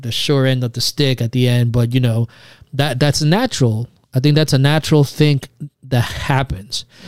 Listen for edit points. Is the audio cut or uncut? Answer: uncut